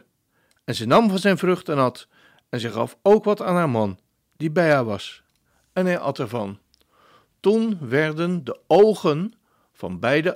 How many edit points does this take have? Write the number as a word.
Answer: one